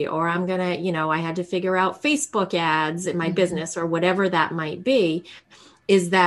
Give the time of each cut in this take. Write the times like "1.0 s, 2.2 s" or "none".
none

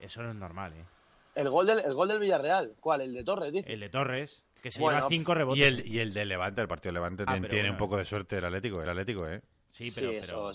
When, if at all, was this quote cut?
4.5 s, 7.3 s, 8.8 s

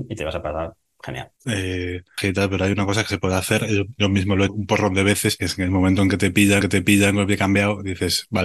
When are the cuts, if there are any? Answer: 1.4 s, 4.5 s, 6.6 s

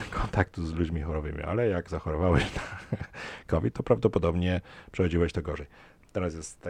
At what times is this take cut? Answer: none

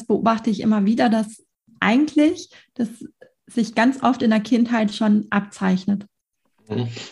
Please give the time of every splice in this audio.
none

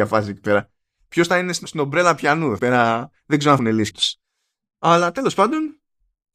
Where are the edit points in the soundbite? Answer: 1.6 s, 2.6 s, 3.6 s, 3.9 s

